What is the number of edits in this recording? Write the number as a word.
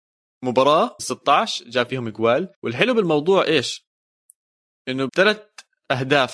three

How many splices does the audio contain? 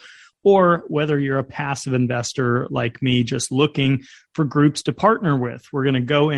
zero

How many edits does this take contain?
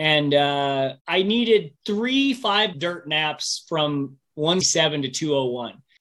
four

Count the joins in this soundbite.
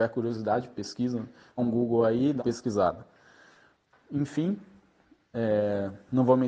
two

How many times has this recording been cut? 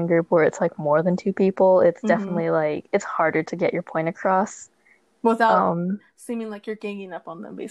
zero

